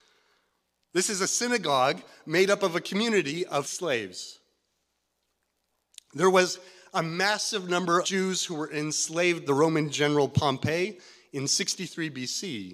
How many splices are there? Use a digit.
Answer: 3